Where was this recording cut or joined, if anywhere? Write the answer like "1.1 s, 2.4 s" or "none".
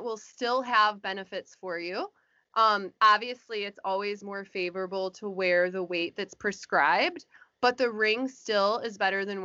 none